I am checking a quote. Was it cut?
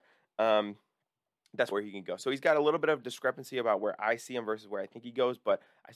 yes; 1 cut; at 1.7 s

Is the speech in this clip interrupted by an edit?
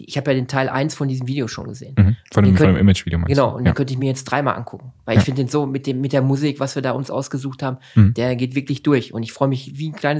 no; 0 cuts

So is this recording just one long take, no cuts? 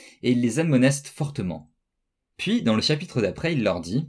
yes; 0 cuts

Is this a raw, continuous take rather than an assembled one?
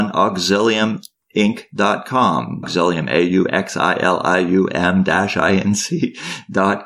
yes; 0 cuts

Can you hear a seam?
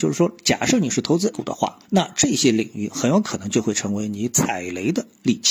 yes; 2 cuts; at 1.3 s, 1.8 s

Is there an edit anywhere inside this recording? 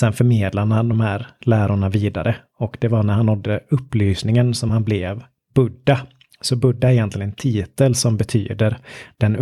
no; 0 cuts

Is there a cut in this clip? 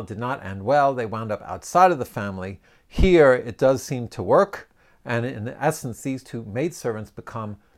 no; 0 cuts

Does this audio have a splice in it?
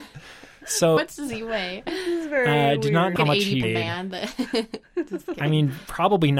yes; 3 cuts; at 1.0 s, 3.2 s, 3.6 s

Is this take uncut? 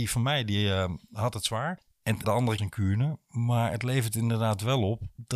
no; 2 cuts; at 2.2 s, 2.6 s

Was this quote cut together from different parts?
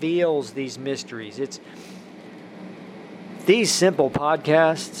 no; 0 cuts

